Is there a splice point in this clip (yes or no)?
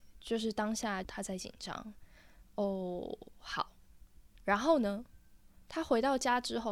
yes